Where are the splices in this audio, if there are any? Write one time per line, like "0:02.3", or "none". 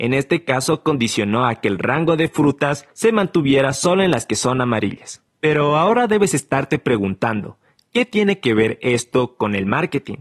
0:02.9
0:05.3